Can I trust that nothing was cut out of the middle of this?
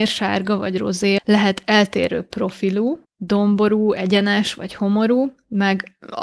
no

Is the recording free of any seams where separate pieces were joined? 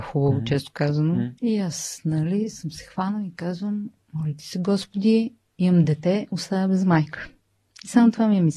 no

